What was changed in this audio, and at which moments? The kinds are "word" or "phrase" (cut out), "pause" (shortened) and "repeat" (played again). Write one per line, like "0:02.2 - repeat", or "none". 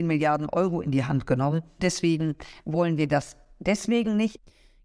0:01.8 - word